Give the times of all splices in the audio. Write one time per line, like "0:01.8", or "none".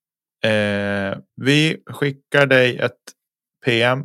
0:01.3